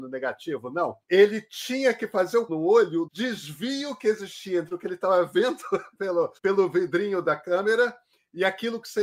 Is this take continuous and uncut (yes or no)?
no